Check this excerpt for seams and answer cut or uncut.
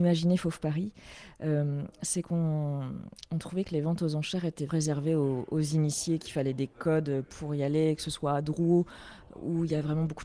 cut